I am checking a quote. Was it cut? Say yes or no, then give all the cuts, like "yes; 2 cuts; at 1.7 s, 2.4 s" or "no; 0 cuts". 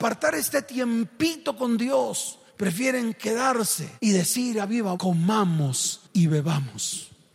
yes; 3 cuts; at 2.5 s, 4.0 s, 4.9 s